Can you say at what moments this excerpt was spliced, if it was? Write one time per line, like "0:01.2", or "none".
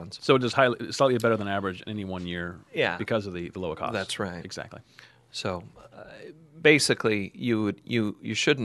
none

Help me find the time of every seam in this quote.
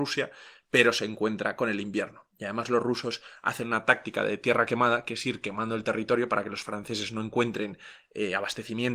none

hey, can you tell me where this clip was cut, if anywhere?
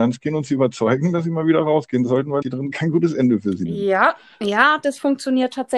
0:02.4

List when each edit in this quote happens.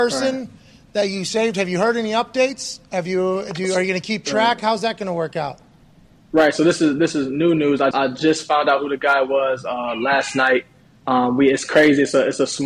0:07.9

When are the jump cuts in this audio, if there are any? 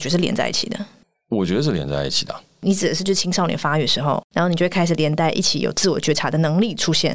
none

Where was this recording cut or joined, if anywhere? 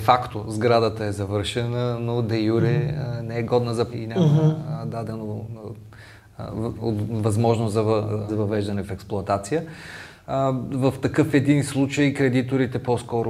0:03.9
0:08.3

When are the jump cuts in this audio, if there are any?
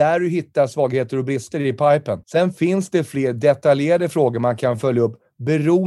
0:02.2

